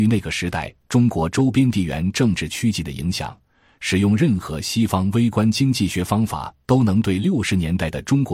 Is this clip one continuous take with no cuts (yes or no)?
yes